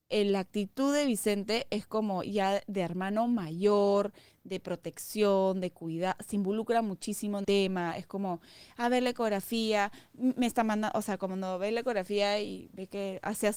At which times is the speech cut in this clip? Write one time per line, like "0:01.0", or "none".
0:07.4